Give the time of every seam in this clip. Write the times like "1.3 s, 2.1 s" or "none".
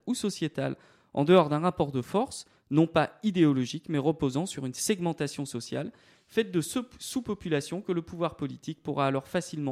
none